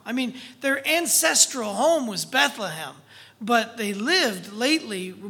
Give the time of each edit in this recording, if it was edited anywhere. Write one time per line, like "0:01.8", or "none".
none